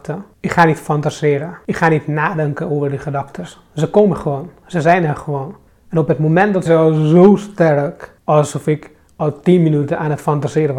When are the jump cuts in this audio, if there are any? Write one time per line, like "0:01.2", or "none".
0:05.7
0:06.7
0:08.2